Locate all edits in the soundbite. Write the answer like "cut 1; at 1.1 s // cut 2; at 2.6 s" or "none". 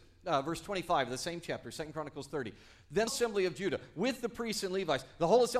cut 1; at 3.1 s